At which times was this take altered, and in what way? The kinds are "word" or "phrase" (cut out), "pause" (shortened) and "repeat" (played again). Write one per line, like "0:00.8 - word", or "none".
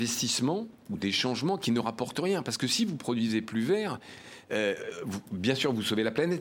none